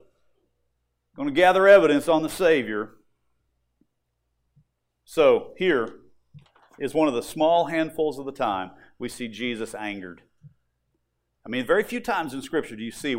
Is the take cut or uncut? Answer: uncut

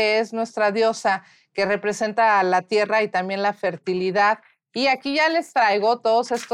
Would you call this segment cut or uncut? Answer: uncut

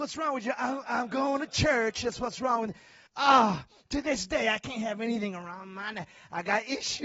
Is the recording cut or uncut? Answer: cut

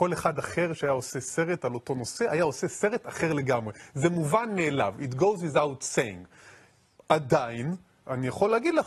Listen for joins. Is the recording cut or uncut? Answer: uncut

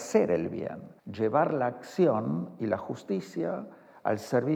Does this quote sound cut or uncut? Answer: cut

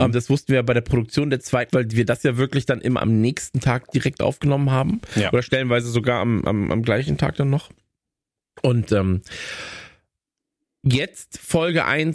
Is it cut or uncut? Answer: cut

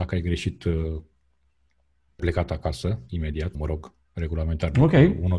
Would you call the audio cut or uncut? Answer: cut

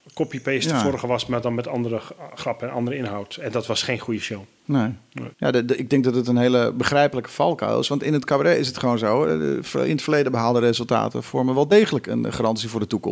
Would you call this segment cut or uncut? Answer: cut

